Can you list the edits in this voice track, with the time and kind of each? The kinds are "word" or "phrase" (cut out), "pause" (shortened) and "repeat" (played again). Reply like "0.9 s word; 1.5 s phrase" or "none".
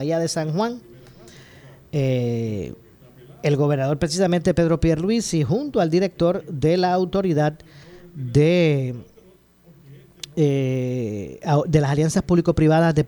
none